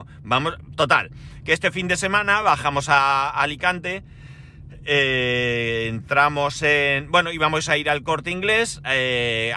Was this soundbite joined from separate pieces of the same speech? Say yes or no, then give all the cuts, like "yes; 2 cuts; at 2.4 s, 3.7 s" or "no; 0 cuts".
no; 0 cuts